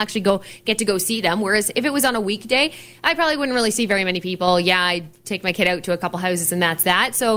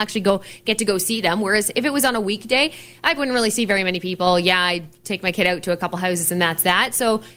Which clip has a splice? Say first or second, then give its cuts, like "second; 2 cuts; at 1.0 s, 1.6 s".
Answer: second; 1 cut; at 3.2 s